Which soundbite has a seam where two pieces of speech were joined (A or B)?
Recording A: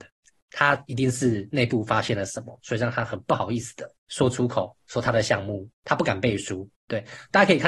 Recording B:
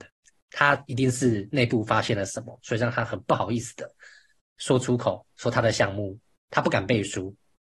A